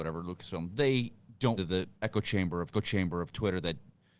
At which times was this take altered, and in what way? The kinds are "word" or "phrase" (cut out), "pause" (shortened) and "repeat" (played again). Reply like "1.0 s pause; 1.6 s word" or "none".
1.6 s word; 1.9 s pause; 2.7 s repeat